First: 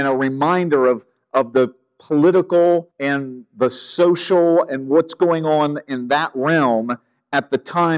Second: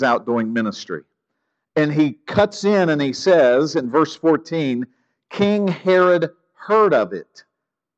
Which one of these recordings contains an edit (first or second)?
first